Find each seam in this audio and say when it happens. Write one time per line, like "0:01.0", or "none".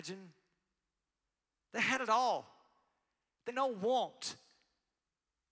0:03.5